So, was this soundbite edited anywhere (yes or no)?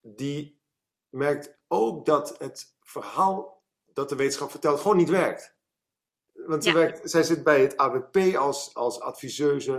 no